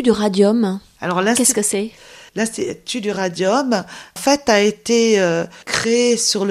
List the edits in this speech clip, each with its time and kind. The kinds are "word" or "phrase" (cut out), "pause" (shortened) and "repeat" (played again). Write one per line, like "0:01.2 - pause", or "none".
0:02.3 - pause